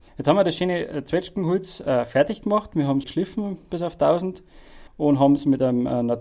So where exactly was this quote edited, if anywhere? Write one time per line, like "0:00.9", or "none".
0:03.0
0:04.9